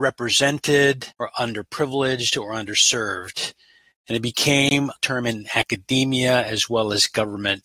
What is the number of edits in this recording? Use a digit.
2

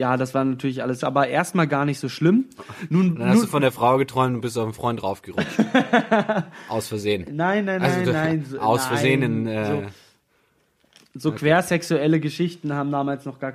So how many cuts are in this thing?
1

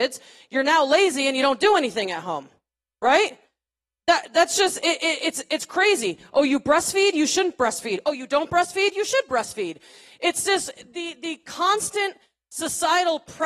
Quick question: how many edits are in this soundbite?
0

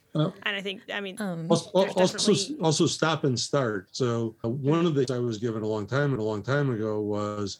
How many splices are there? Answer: 3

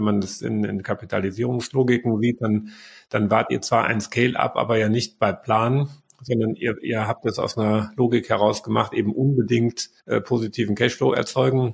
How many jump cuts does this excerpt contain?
1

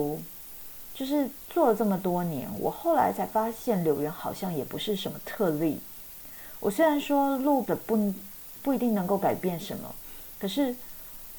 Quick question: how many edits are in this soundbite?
1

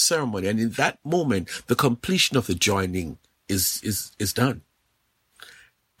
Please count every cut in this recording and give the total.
1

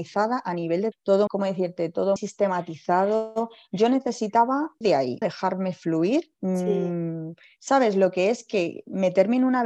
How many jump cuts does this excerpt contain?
6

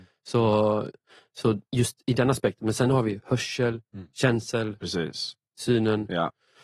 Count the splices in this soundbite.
2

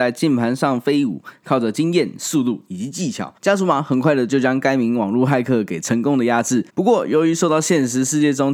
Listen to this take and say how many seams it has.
2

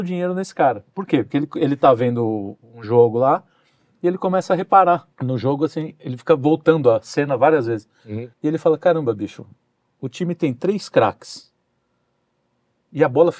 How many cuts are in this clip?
2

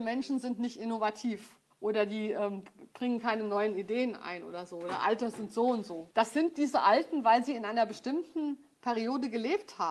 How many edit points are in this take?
2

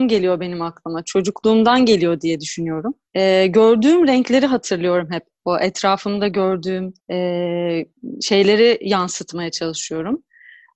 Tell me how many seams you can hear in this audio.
2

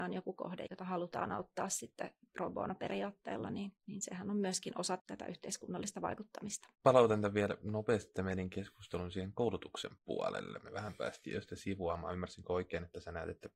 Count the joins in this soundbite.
3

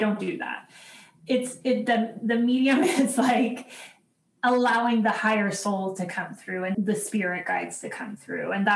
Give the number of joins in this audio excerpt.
1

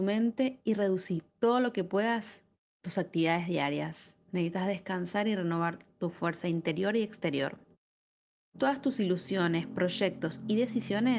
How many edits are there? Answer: 0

